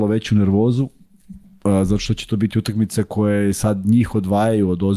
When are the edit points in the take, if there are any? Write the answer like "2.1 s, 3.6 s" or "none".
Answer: none